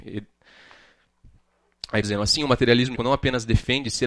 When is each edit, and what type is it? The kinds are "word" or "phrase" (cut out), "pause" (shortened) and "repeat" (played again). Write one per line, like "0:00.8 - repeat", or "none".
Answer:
0:02.0 - word
0:03.0 - word